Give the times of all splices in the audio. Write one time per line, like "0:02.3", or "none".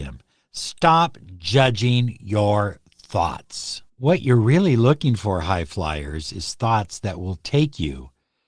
0:03.9

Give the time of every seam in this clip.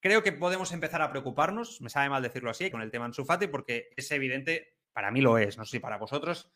0:02.7
0:04.9

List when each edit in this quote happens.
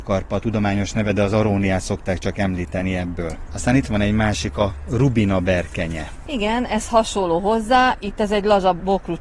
none

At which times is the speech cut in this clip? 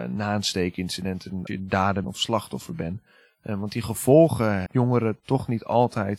0:01.5
0:02.0
0:04.7

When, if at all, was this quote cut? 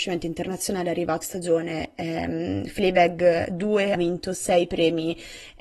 0:01.2
0:03.9

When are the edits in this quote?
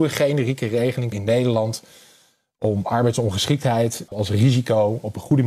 0:01.1
0:04.1

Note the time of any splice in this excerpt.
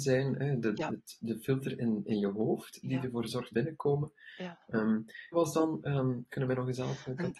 0:03.5
0:05.3

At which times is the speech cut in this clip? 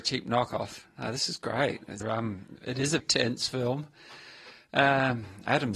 0:02.0
0:03.0

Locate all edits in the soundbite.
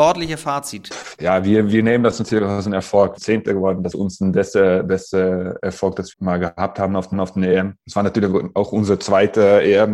0:03.2
0:03.9
0:06.1
0:07.1

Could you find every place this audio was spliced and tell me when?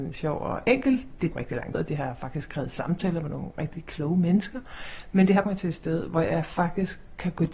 0:01.3
0:01.7
0:05.4

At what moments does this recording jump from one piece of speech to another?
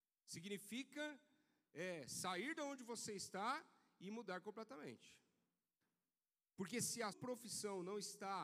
0:07.1

